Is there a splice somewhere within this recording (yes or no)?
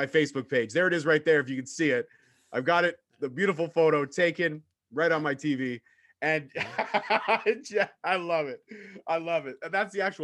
no